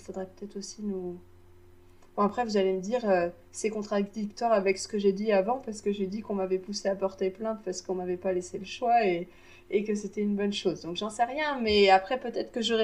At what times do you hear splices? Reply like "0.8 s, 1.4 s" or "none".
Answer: none